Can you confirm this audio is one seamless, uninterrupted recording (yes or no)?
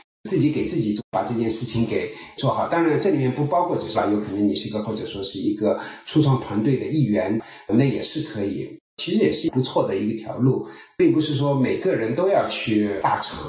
no